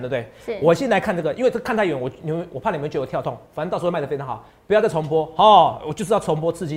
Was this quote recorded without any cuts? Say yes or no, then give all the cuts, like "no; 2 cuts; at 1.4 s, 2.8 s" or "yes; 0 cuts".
yes; 0 cuts